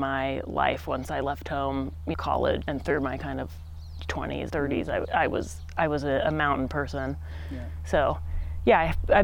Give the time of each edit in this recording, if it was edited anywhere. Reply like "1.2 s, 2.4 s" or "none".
2.1 s, 2.6 s, 4.5 s

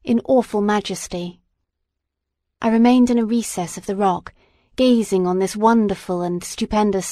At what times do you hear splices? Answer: none

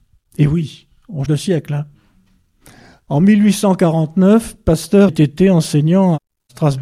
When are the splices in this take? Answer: 1.3 s, 5.1 s

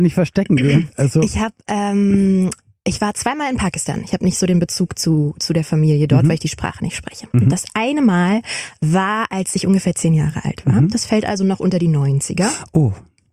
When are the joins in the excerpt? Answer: none

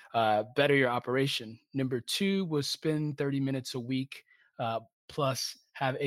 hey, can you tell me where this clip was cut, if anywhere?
none

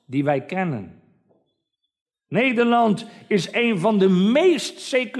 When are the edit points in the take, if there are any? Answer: none

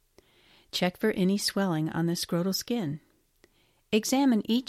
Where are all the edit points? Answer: none

